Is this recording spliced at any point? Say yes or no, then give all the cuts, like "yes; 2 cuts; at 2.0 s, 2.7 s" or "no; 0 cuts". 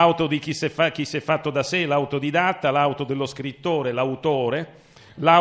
no; 0 cuts